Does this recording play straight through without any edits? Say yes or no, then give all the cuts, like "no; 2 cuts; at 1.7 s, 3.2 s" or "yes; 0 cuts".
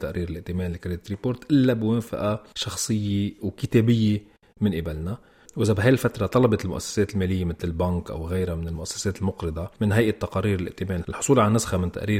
yes; 0 cuts